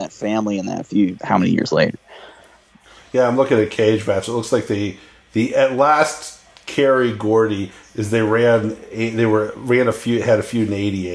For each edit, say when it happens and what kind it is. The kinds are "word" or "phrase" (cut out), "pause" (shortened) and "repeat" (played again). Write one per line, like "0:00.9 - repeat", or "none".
0:01.1 - word